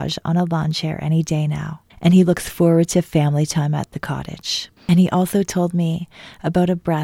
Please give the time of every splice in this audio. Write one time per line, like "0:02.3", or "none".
0:01.9
0:04.8